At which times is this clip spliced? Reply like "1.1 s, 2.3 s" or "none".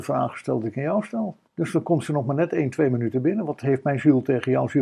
1.5 s